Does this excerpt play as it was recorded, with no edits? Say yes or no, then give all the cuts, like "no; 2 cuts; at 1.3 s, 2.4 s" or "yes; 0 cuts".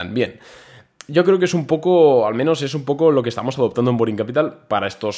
yes; 0 cuts